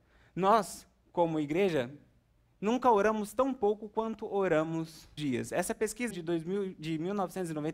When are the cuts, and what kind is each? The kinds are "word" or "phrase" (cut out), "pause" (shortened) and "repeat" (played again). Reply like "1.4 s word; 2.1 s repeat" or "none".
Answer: 5.2 s phrase; 6.1 s word